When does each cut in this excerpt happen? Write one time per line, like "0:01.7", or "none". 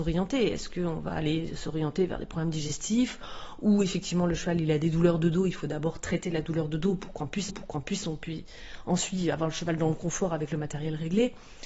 0:07.5